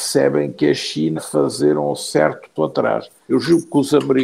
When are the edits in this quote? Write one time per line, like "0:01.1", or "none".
0:01.2
0:02.6